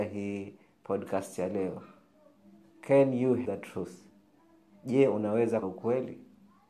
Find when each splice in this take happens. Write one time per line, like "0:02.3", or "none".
0:03.5
0:05.6